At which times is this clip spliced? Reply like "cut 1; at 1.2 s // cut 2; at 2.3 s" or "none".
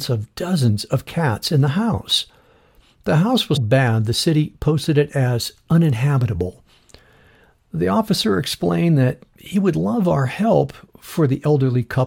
cut 1; at 3.6 s // cut 2; at 9.2 s